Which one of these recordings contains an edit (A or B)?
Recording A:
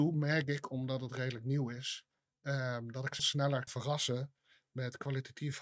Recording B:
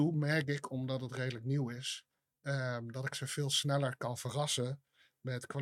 A